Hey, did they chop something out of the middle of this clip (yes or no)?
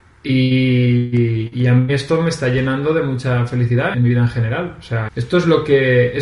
yes